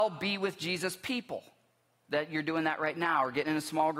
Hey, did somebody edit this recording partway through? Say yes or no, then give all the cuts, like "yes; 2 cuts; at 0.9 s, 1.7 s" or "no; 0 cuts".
no; 0 cuts